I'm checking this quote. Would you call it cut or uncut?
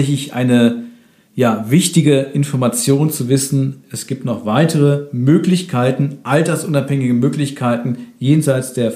uncut